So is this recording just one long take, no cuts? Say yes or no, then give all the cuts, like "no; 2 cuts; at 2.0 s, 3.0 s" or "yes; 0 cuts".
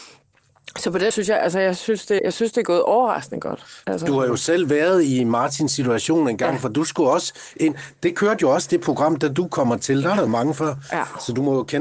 no; 3 cuts; at 1.1 s, 2.2 s, 10.3 s